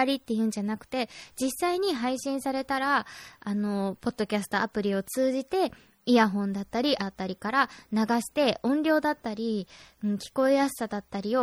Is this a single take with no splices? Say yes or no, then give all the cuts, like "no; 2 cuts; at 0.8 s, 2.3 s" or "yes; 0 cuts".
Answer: no; 1 cut; at 7.0 s